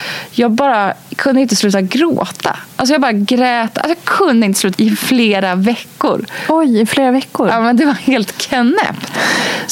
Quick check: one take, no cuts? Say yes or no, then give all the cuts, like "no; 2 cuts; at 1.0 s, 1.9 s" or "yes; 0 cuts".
no; 1 cut; at 4.7 s